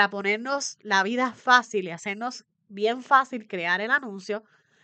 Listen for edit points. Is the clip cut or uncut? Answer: uncut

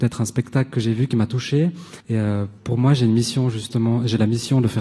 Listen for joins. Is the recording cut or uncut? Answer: cut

